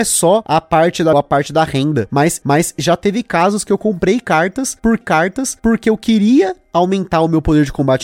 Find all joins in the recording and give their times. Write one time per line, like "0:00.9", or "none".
0:01.1
0:02.4
0:05.0